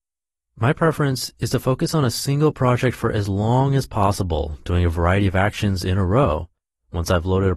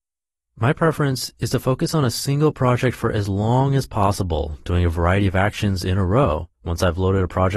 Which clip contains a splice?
second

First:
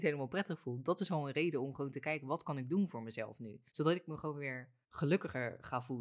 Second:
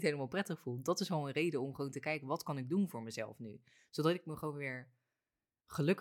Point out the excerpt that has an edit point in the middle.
first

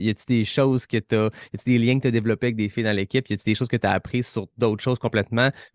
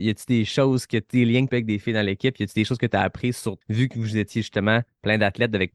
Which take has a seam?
second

